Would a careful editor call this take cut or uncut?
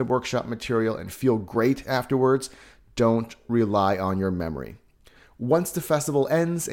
uncut